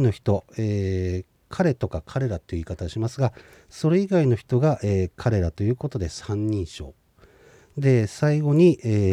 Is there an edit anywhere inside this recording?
no; 0 cuts

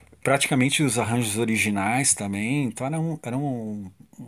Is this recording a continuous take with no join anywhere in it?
yes; 0 cuts

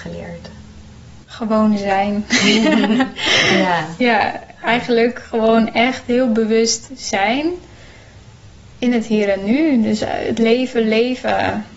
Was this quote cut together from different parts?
yes; 2 cuts; at 1.2 s, 8.6 s

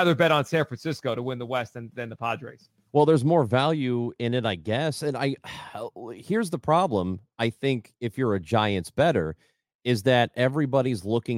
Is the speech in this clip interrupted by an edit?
no; 0 cuts

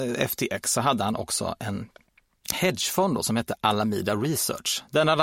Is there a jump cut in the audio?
no; 0 cuts

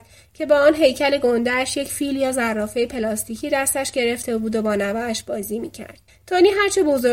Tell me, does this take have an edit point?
yes; 1 cut; at 6.1 s

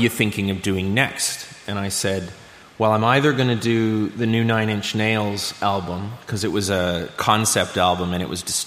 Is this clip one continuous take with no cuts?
yes; 0 cuts

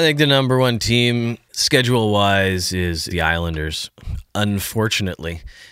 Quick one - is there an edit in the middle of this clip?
yes; 1 cut; at 3.1 s

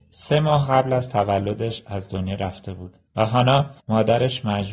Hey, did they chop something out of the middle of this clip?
yes; 2 cuts; at 3.1 s, 3.8 s

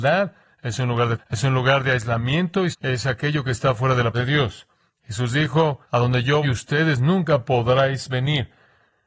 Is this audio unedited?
no; 5 cuts; at 1.2 s, 2.7 s, 4.1 s, 5.8 s, 6.4 s

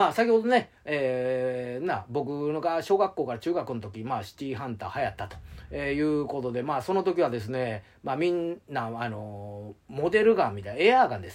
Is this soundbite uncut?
yes; 0 cuts

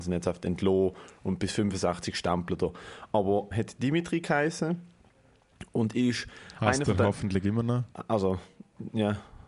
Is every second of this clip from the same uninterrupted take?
no; 1 cut; at 3.5 s

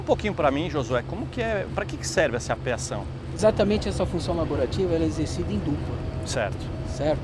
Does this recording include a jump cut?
no; 0 cuts

